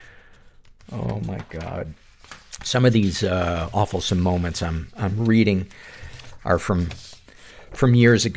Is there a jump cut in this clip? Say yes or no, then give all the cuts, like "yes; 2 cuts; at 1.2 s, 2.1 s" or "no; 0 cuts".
no; 0 cuts